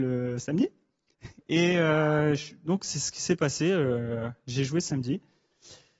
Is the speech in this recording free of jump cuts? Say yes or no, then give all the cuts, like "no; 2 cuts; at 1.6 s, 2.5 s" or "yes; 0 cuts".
yes; 0 cuts